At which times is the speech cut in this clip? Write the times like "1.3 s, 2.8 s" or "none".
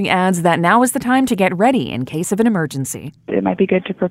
none